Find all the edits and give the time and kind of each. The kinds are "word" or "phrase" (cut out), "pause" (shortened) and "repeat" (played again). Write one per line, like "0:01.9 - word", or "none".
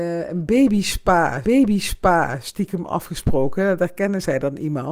0:01.4 - repeat